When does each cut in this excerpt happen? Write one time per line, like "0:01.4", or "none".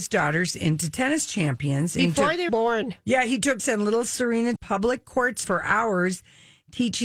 0:02.5
0:03.6
0:04.6
0:05.4